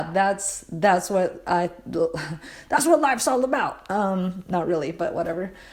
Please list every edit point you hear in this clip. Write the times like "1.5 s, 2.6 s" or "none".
none

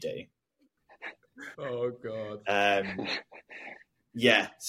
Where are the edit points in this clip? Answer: 1.5 s

